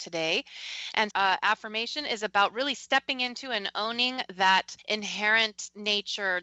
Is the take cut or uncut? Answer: cut